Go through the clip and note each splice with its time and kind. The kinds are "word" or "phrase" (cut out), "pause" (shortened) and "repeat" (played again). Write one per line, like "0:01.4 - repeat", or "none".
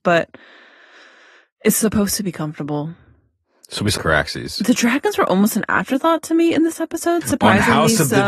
0:04.0 - phrase